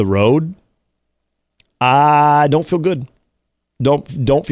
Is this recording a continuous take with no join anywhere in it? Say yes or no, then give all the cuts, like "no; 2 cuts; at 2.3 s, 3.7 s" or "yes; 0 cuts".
yes; 0 cuts